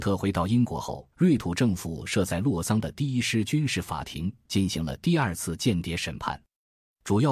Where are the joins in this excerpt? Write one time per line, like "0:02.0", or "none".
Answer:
0:01.1

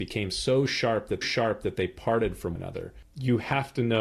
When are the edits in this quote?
0:01.2
0:02.6

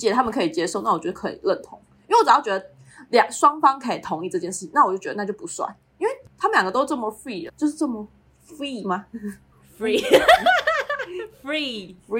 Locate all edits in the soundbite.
0:07.5
0:08.4

